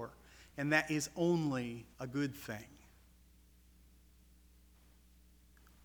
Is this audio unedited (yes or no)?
no